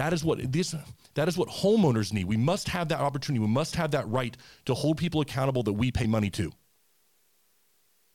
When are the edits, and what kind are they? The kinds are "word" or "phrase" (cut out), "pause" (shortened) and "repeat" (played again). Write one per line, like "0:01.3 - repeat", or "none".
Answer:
none